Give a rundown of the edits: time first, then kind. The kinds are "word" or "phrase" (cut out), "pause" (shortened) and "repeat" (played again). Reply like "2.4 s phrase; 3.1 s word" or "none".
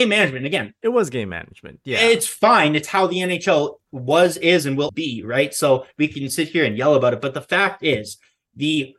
4.9 s word